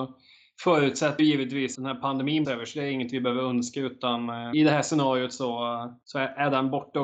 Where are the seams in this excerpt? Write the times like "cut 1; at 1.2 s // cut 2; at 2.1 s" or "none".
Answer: cut 1; at 1.2 s // cut 2; at 1.7 s // cut 3; at 2.4 s // cut 4; at 4.5 s // cut 5; at 6.0 s